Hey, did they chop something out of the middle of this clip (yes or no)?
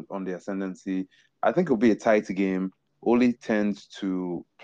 no